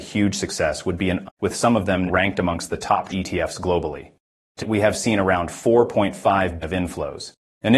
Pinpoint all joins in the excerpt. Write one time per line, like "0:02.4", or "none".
0:01.2
0:02.1
0:03.1
0:04.6
0:06.6